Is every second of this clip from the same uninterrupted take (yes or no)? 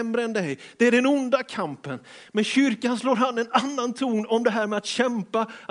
yes